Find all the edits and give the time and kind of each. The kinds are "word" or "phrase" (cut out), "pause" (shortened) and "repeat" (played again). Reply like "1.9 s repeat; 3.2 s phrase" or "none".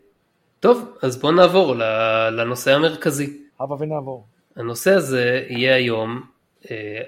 3.5 s pause

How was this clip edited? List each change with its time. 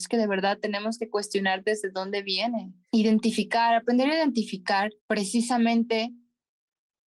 2.8 s pause; 5.0 s pause

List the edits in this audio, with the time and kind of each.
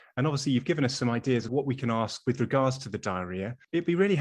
1.5 s word

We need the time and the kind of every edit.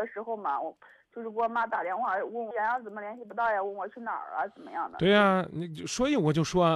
2.5 s word

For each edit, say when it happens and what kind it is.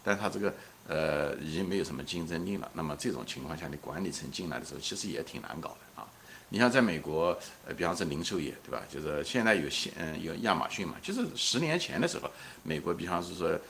none

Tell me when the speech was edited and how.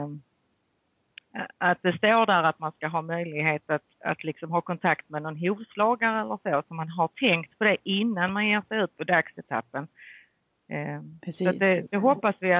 none

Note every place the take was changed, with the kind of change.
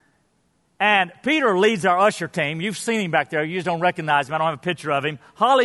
none

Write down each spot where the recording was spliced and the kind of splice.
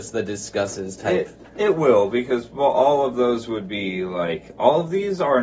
none

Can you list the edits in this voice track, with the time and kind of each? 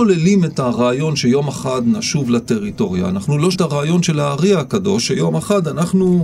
3.5 s word

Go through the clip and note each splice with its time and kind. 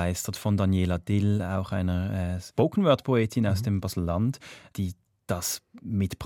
none

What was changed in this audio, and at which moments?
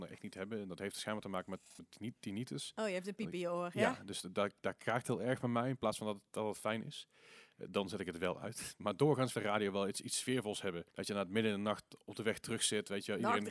1.8 s word; 9.3 s phrase; 10.9 s pause

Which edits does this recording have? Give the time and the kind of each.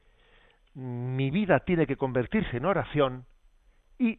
none

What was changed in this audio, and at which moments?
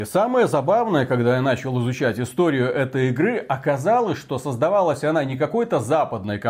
none

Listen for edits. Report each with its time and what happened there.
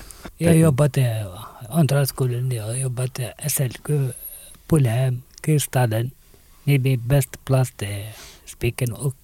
none

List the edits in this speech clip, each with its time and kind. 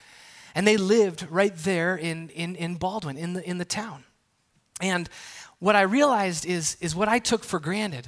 none

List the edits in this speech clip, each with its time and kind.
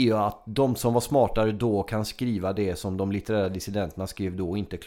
none

